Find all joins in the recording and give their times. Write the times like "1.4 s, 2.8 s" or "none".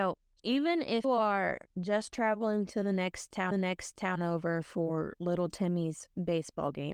1.0 s, 3.5 s